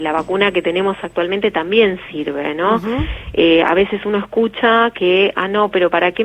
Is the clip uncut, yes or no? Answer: yes